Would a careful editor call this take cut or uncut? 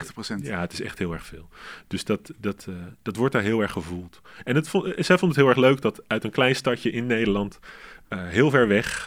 uncut